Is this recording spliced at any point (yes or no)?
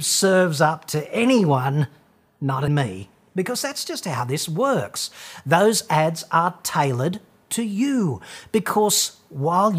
yes